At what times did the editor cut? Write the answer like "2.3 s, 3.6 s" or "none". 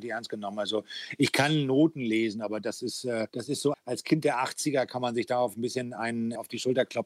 3.3 s, 3.7 s